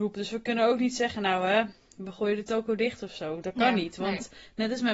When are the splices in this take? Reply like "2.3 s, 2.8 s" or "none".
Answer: none